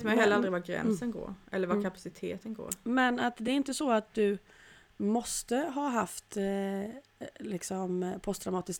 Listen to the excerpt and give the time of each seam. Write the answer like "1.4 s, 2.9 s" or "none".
none